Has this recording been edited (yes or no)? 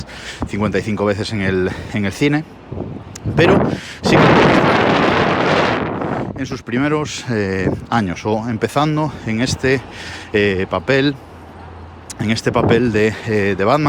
no